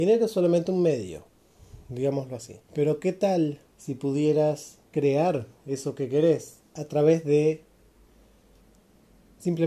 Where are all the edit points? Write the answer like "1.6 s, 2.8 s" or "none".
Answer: 2.6 s, 3.7 s, 4.9 s